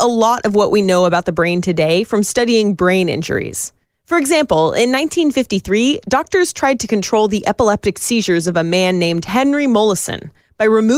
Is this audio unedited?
yes; 0 cuts

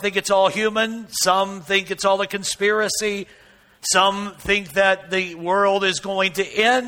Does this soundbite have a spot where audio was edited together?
no; 0 cuts

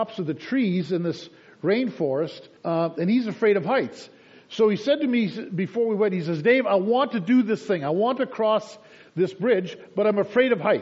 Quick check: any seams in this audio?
yes; 1 cut; at 2.6 s

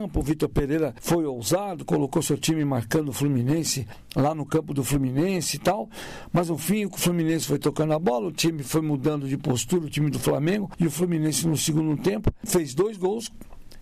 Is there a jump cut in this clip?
no; 0 cuts

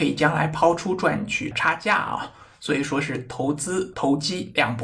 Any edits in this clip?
no; 0 cuts

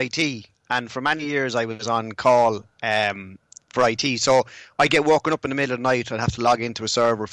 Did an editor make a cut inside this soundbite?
no; 0 cuts

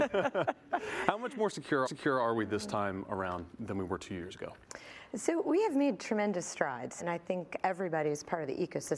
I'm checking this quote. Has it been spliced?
yes; 3 cuts; at 1.9 s, 3.6 s, 7.0 s

